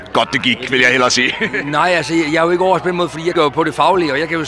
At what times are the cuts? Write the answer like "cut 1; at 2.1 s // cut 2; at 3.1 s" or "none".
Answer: cut 1; at 3.3 s